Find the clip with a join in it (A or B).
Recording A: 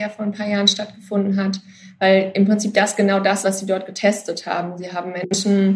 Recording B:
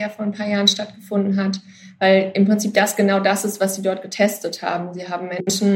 A